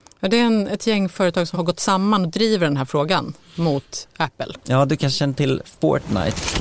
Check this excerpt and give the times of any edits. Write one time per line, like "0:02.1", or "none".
0:01.5